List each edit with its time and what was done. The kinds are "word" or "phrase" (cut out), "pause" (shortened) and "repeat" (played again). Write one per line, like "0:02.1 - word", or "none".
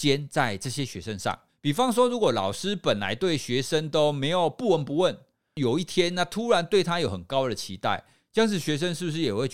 0:01.5 - pause